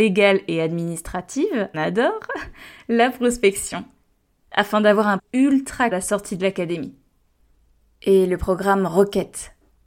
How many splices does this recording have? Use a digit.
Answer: 3